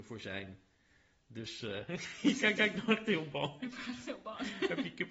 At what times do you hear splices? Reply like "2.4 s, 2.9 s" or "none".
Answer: 2.6 s